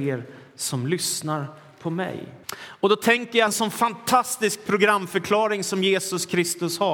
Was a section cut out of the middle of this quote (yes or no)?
yes